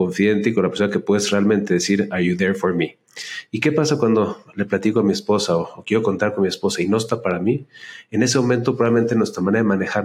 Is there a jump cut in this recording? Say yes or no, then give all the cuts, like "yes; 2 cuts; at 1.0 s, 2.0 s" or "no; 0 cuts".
no; 0 cuts